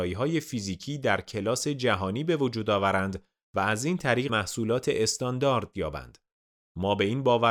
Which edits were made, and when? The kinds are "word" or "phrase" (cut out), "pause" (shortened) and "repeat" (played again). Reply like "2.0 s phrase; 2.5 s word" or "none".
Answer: 4.3 s word; 5.7 s word